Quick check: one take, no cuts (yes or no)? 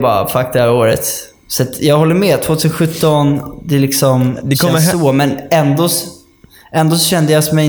yes